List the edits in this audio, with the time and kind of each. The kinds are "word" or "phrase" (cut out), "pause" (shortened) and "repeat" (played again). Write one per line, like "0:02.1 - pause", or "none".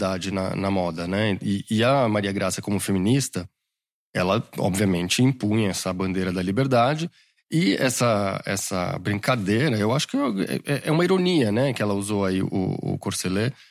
none